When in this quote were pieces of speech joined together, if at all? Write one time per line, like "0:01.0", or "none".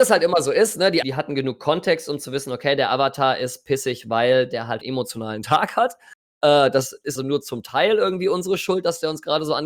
0:01.0
0:04.8
0:07.2